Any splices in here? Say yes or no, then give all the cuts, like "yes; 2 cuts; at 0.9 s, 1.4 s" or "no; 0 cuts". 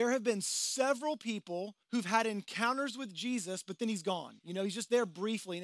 yes; 1 cut; at 1.8 s